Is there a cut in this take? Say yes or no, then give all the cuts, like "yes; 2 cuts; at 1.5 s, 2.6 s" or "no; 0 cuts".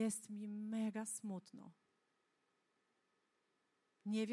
no; 0 cuts